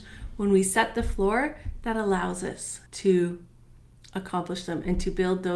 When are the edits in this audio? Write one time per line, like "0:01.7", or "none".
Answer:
0:02.9